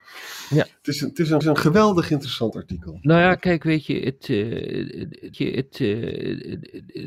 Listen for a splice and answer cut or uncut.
cut